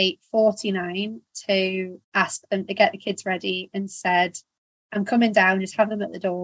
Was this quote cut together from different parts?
yes; 1 cut; at 2.0 s

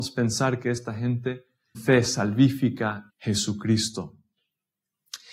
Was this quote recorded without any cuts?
no; 2 cuts; at 1.7 s, 3.1 s

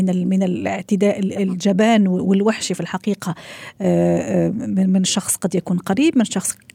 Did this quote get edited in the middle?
no; 0 cuts

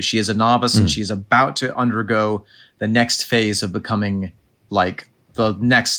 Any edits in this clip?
no; 0 cuts

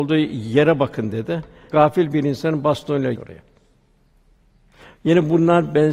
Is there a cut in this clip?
yes; 1 cut; at 3.1 s

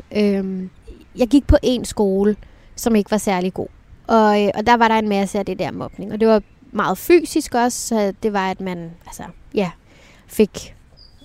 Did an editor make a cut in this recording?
yes; 1 cut; at 9.0 s

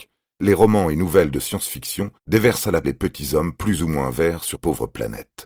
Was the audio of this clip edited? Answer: yes; 3 cuts; at 2.2 s, 2.8 s, 4.5 s

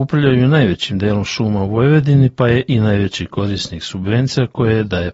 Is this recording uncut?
yes; 0 cuts

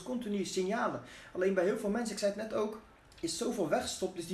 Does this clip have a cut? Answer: yes; 1 cut; at 3.0 s

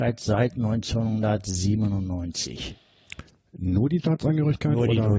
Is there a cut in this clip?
yes; 1 cut; at 4.0 s

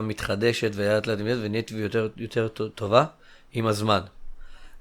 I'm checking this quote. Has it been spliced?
no; 0 cuts

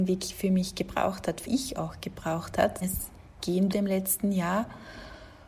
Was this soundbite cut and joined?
yes; 3 cuts; at 1.5 s, 2.8 s, 3.7 s

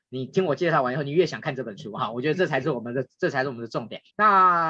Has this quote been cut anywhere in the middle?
no; 0 cuts

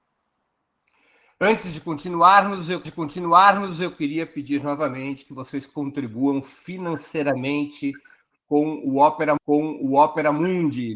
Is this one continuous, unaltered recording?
no; 2 cuts; at 2.8 s, 9.4 s

